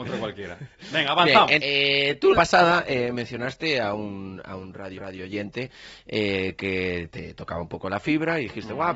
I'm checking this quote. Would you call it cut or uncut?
cut